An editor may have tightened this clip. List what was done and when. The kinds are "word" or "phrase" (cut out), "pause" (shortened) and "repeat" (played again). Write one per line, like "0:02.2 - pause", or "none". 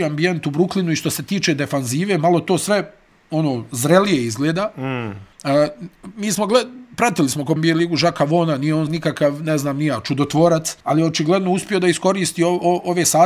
0:05.3 - pause
0:07.6 - word
0:08.9 - word
0:10.8 - pause